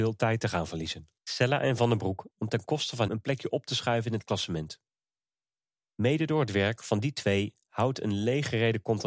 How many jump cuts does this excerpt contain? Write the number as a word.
three